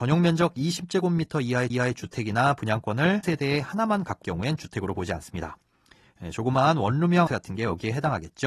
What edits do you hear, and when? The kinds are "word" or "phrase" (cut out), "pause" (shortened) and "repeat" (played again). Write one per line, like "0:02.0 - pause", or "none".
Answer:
0:01.7 - repeat
0:03.2 - word
0:04.2 - word
0:07.3 - word

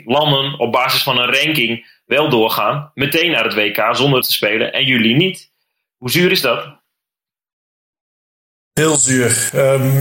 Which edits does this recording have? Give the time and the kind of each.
0:04.2 - word

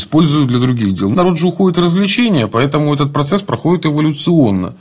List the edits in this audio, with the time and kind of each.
0:01.1 - word

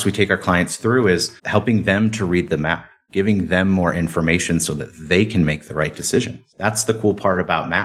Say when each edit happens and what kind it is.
0:01.4 - pause

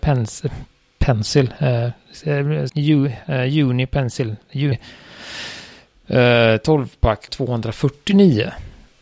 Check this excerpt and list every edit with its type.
0:02.7 - word
0:04.7 - word
0:07.3 - word

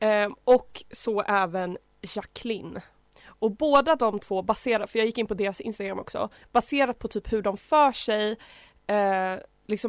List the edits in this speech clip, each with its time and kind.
none

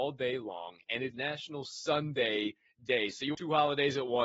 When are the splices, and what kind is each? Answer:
0:01.1 - word
0:03.3 - phrase

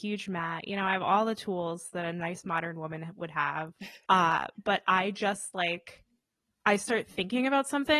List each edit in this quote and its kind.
0:04.0 - pause

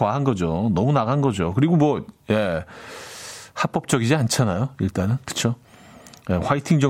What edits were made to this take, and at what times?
0:05.2 - pause

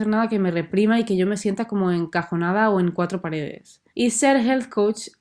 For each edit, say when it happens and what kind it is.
0:03.9 - pause

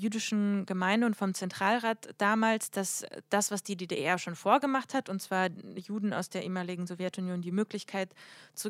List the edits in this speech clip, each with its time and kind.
none

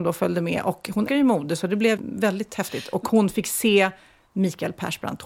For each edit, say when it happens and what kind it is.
0:01.1 - word
0:02.0 - word

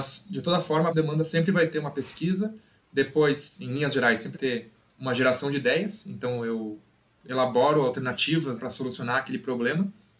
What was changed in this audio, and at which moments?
0:00.9 - phrase
0:04.3 - word
0:08.6 - word

